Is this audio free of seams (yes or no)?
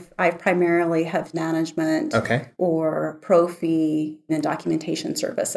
no